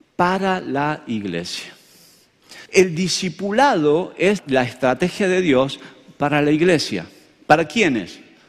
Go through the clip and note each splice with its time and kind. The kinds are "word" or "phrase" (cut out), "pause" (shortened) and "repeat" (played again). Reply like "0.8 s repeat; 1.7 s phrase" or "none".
2.7 s pause; 4.4 s word